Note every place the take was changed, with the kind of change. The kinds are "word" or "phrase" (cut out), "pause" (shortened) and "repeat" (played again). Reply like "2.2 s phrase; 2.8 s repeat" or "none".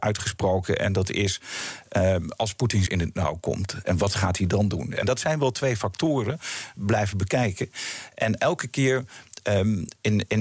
2.9 s word; 6.7 s phrase